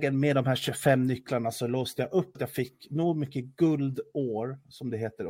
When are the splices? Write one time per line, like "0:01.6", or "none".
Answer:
0:02.3